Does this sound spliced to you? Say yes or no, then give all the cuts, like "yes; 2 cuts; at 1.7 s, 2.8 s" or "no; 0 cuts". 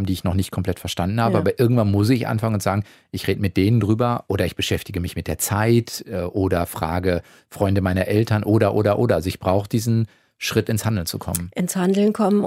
no; 0 cuts